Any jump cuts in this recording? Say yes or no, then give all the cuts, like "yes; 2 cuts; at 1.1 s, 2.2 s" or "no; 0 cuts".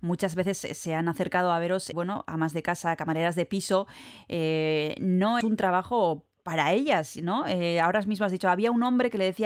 yes; 2 cuts; at 1.9 s, 5.4 s